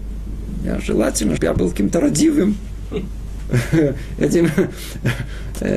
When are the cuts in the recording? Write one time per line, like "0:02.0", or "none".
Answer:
0:01.4